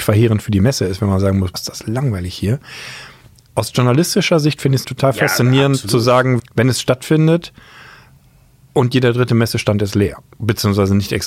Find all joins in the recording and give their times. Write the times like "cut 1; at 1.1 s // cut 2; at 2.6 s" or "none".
cut 1; at 1.5 s // cut 2; at 4.8 s // cut 3; at 6.4 s